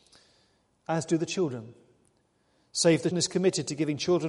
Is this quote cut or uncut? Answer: cut